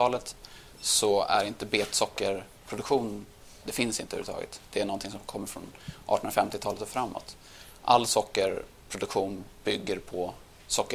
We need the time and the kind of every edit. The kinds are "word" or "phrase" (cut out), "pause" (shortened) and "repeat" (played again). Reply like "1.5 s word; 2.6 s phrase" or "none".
none